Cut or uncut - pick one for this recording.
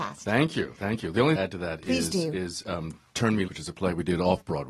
cut